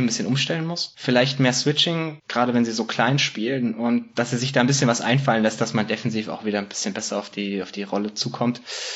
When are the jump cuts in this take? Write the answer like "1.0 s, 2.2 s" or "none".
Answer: none